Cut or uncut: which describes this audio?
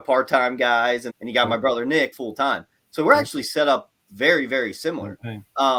cut